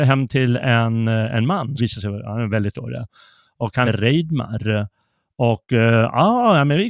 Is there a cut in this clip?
yes; 3 cuts; at 1.8 s, 2.7 s, 3.8 s

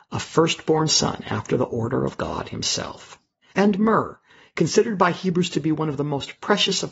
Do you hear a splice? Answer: no; 0 cuts

